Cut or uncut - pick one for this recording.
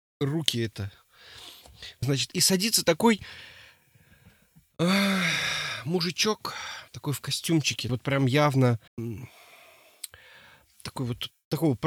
cut